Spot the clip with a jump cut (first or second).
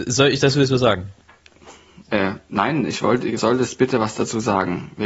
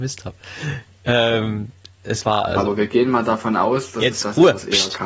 first